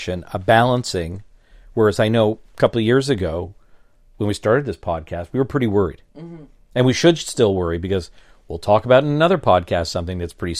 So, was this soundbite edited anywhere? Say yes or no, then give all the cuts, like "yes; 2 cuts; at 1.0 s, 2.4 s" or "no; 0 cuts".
yes; 1 cut; at 6.1 s